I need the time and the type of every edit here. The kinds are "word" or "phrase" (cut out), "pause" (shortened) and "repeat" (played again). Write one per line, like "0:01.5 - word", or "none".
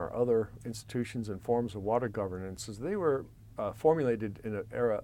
none